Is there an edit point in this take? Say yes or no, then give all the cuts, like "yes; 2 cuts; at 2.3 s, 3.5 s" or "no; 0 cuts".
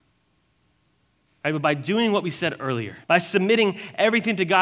yes; 1 cut; at 3.0 s